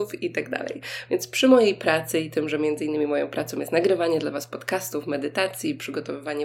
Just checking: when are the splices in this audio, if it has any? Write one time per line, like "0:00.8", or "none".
none